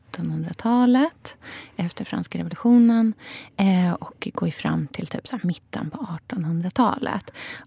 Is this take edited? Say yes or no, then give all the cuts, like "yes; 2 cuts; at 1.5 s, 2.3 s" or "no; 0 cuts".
no; 0 cuts